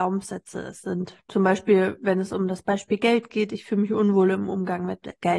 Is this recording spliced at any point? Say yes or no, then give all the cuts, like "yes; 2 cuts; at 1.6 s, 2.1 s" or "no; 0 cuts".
yes; 1 cut; at 1.2 s